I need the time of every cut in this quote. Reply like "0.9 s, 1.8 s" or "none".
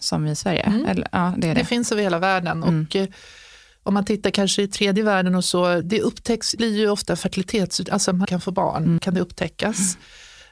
5.8 s, 6.6 s, 8.2 s, 9.0 s